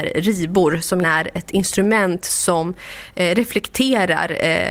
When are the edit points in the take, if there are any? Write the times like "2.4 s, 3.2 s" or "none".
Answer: 1.0 s

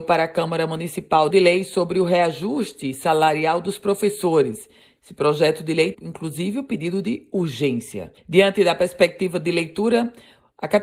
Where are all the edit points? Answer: 1.3 s, 5.9 s, 8.2 s

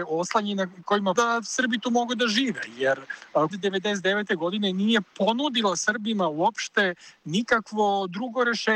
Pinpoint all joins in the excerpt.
1.2 s, 3.5 s

